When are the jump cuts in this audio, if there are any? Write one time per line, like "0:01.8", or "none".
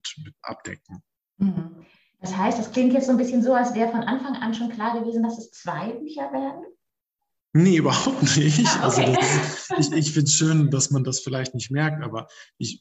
none